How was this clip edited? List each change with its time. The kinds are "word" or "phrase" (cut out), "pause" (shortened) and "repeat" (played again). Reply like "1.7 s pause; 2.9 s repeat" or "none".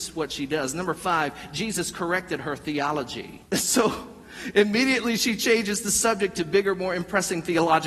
3.4 s pause